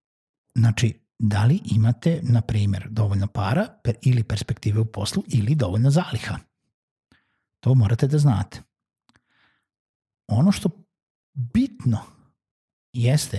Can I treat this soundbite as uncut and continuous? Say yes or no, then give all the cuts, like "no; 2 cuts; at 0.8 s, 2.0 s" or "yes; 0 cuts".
yes; 0 cuts